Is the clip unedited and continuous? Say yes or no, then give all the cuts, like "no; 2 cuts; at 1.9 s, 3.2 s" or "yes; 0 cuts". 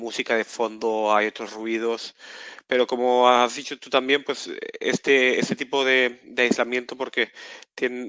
yes; 0 cuts